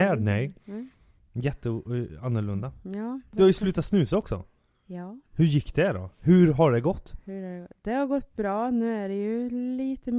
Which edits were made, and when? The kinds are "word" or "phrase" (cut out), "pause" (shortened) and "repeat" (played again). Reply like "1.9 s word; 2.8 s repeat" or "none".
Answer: none